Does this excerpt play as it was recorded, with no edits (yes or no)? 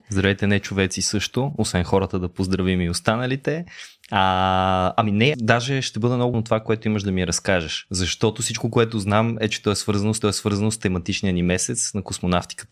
no